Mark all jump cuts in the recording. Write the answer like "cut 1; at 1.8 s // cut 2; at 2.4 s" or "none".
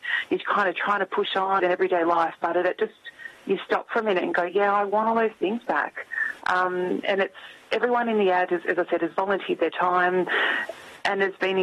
cut 1; at 1.6 s // cut 2; at 7.0 s